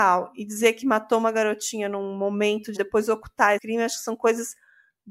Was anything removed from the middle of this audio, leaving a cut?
yes; 2 cuts; at 2.7 s, 3.6 s

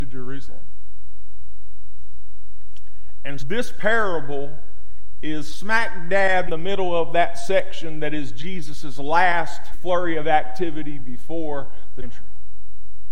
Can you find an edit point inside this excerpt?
yes; 4 cuts; at 3.4 s, 6.5 s, 9.7 s, 12.0 s

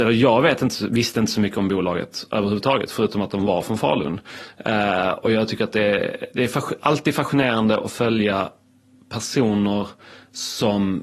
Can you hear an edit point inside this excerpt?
no; 0 cuts

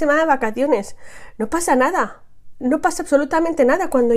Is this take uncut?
yes; 0 cuts

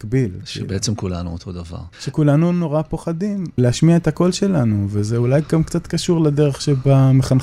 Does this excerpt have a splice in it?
yes; 1 cut; at 1.9 s

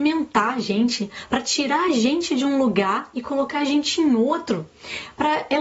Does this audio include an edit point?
no; 0 cuts

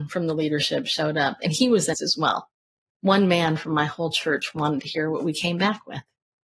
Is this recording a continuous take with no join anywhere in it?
no; 1 cut; at 1.9 s

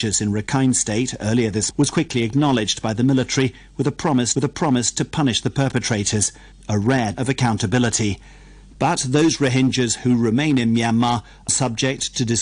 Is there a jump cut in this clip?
yes; 4 cuts; at 1.7 s, 4.4 s, 7.1 s, 11.5 s

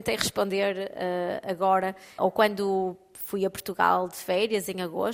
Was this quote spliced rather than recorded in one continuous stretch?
yes; 1 cut; at 2.2 s

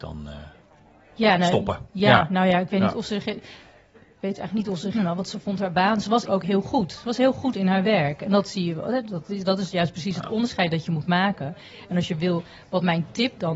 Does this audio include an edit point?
yes; 2 cuts; at 4.9 s, 6.3 s

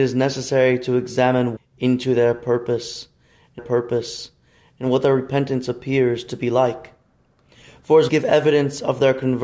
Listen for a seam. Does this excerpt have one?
yes; 3 cuts; at 1.6 s, 3.6 s, 8.1 s

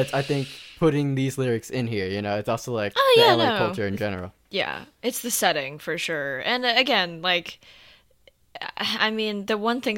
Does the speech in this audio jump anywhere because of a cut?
no; 0 cuts

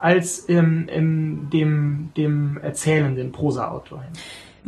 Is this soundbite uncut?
yes; 0 cuts

